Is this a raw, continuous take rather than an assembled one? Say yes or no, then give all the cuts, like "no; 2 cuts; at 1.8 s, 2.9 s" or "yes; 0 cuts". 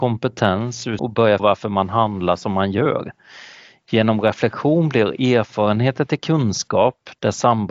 no; 2 cuts; at 1.0 s, 1.4 s